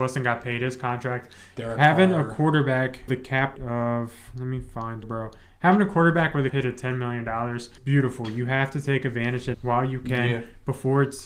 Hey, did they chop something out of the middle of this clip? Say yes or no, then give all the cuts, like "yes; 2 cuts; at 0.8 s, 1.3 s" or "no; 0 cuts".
yes; 6 cuts; at 3.1 s, 3.6 s, 5.0 s, 6.5 s, 7.8 s, 9.5 s